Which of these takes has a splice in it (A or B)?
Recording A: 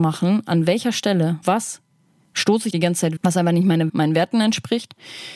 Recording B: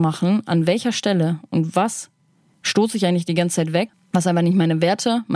A